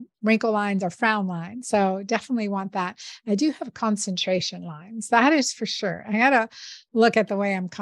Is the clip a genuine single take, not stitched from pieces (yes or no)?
yes